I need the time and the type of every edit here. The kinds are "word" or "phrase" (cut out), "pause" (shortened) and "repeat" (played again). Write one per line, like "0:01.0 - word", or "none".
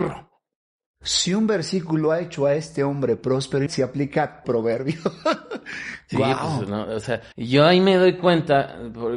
0:03.7 - word
0:04.4 - word
0:07.3 - pause